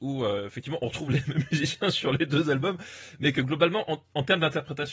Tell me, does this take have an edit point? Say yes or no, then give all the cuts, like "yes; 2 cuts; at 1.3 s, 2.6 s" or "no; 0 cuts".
no; 0 cuts